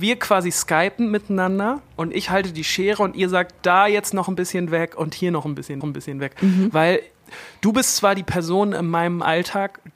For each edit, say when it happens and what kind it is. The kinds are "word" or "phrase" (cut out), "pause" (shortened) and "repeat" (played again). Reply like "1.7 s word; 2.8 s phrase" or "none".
5.8 s repeat

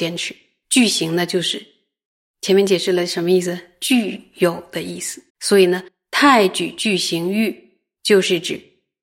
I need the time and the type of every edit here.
5.3 s pause; 5.9 s pause

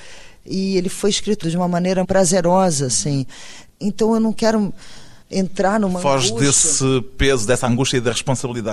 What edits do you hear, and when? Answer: 1.4 s word; 2.0 s word; 5.2 s pause

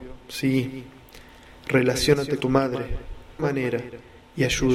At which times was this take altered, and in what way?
2.4 s word; 3.4 s phrase

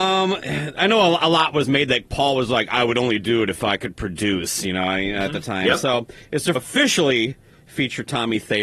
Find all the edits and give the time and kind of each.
6.6 s phrase

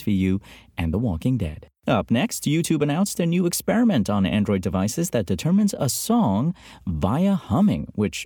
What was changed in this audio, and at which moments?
1.8 s pause

